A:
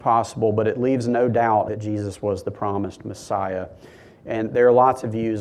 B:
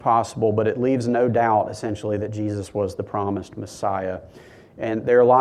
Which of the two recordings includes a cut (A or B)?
A